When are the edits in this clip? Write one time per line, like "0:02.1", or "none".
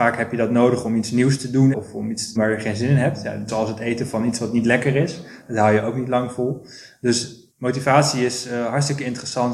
0:01.7
0:02.4
0:03.5
0:07.5